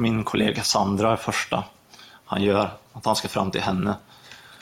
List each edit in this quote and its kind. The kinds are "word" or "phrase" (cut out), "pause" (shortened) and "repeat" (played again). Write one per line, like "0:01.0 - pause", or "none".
none